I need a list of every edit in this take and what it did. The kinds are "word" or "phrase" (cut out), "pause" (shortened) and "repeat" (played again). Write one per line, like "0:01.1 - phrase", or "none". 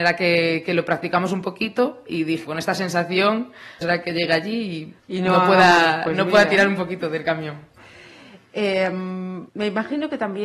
0:02.4 - word
0:03.8 - word
0:05.0 - pause
0:09.5 - pause